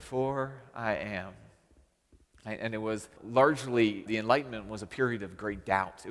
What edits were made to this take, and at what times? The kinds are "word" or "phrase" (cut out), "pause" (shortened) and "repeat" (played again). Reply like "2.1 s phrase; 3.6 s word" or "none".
3.2 s word; 4.1 s word